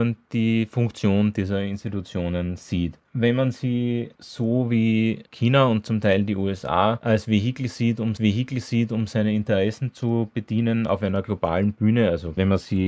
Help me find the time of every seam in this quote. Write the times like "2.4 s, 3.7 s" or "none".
8.2 s